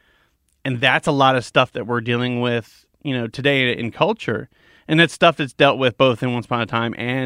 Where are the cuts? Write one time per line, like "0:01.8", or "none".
none

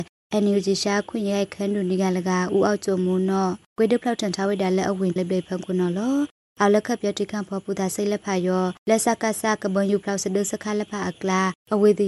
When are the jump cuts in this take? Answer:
0:05.2

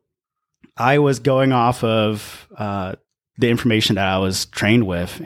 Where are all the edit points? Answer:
none

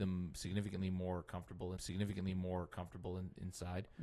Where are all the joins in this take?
0:01.8

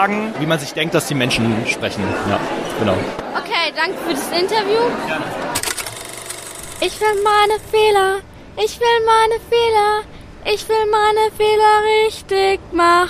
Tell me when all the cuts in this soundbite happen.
none

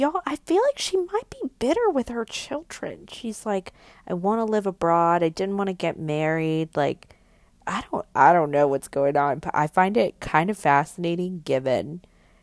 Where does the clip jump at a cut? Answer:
none

